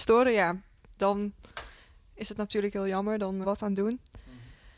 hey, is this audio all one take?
no; 1 cut; at 3.4 s

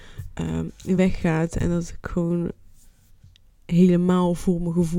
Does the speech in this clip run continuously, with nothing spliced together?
yes; 0 cuts

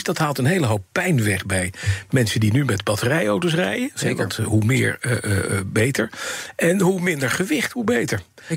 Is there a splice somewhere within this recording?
no; 0 cuts

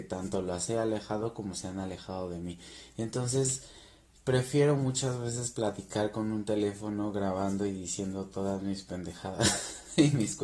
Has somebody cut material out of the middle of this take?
no; 0 cuts

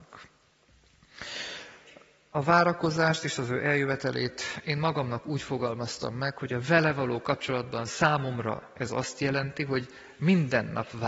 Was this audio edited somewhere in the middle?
no; 0 cuts

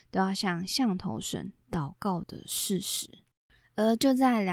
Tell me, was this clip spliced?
no; 0 cuts

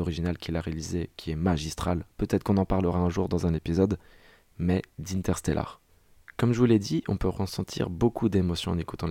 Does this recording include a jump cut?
no; 0 cuts

